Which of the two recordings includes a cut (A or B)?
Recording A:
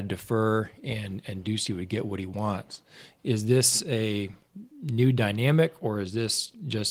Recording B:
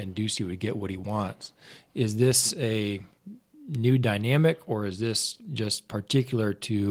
A